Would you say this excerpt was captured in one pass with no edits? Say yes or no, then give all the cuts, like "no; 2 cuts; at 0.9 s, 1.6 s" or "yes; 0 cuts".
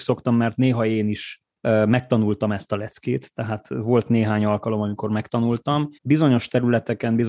no; 2 cuts; at 1.5 s, 6.0 s